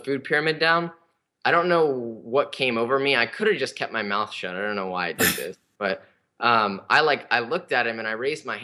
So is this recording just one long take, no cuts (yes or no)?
yes